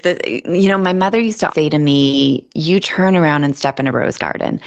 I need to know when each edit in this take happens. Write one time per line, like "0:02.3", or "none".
0:01.5
0:02.8